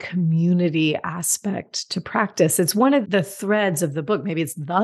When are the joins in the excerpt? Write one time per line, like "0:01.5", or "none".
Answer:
0:03.0